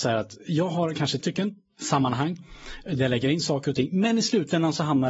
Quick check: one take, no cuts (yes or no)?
no